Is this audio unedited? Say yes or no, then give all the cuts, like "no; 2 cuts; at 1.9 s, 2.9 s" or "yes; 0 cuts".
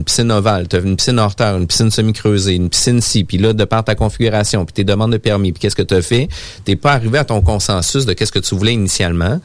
yes; 0 cuts